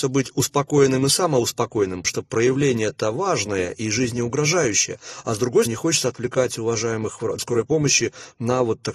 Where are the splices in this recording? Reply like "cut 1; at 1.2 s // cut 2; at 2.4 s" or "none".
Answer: cut 1; at 2.0 s // cut 2; at 5.7 s // cut 3; at 7.4 s